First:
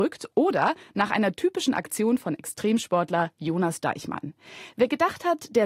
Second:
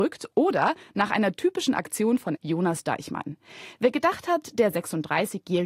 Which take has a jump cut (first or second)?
second